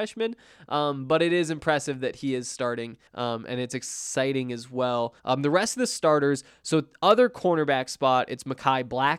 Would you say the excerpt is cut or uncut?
cut